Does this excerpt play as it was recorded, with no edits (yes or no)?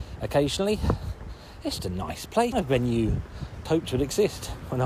no